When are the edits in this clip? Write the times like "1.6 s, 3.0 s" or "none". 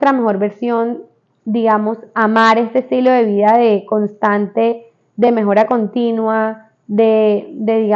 none